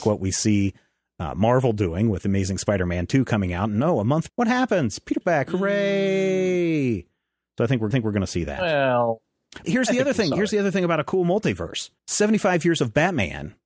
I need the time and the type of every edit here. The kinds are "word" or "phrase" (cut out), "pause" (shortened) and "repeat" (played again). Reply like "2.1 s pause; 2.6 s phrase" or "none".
4.3 s word; 5.2 s word; 7.9 s repeat; 9.6 s word; 12.0 s pause